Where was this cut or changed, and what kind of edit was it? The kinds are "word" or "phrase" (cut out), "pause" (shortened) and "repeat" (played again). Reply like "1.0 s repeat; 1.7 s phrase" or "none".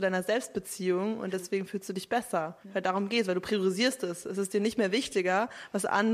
2.6 s pause